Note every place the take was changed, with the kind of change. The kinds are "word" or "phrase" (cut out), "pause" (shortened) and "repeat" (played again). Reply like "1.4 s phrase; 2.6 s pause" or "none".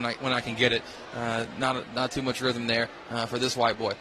none